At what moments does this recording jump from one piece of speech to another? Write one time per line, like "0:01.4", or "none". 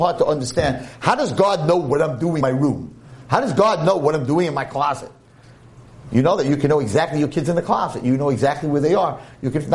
0:02.4